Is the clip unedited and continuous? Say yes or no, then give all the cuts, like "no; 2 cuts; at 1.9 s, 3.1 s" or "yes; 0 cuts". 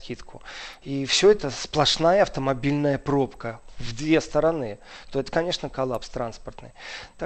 yes; 0 cuts